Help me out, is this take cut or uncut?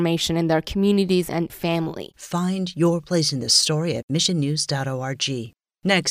uncut